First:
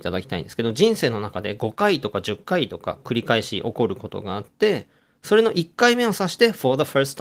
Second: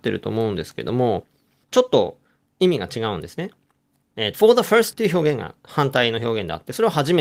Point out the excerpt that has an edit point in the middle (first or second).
second